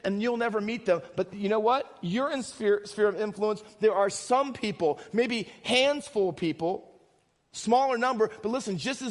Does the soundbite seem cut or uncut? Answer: uncut